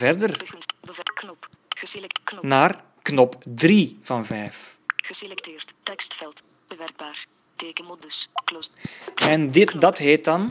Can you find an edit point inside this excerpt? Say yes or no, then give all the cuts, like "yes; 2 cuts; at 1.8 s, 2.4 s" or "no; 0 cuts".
no; 0 cuts